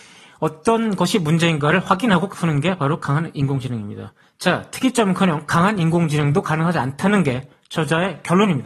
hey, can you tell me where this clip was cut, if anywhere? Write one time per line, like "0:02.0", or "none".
0:02.3
0:04.2